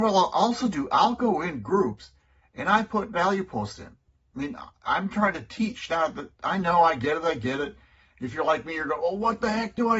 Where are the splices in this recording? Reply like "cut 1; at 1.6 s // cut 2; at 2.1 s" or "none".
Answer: none